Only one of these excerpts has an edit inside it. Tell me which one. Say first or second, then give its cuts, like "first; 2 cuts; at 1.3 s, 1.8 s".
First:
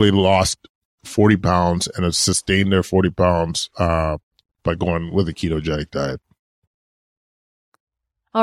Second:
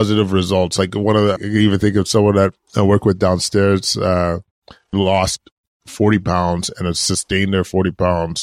second; 2 cuts; at 1.4 s, 4.9 s